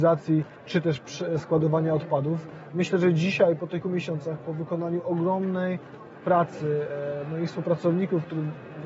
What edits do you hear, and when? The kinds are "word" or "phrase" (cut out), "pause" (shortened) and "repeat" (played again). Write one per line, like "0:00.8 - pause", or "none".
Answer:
0:03.8 - word